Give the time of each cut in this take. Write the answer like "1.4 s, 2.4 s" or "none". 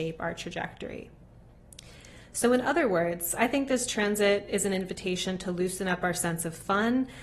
none